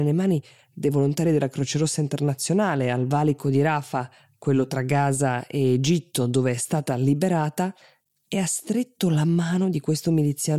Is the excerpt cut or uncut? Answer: uncut